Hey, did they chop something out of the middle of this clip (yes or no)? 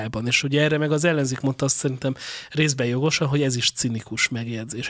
no